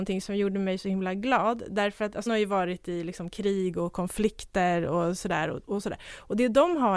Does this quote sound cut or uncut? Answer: cut